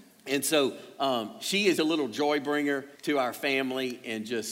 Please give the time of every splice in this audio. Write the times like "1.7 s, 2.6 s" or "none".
1.8 s, 2.9 s